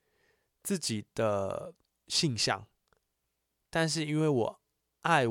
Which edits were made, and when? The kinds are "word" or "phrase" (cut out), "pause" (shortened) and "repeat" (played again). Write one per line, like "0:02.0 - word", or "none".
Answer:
none